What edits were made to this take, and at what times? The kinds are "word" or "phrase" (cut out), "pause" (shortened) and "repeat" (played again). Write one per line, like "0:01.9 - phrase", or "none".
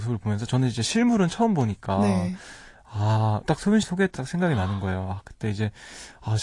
0:03.4 - word
0:03.8 - word
0:04.2 - word